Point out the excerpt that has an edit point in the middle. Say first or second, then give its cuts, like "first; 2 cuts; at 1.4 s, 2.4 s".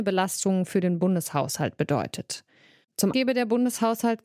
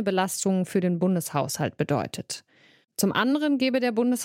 first; 1 cut; at 3.1 s